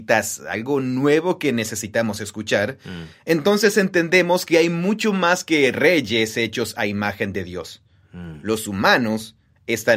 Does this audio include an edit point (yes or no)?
no